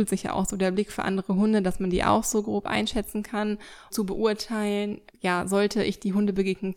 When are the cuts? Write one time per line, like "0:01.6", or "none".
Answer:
0:03.9
0:05.1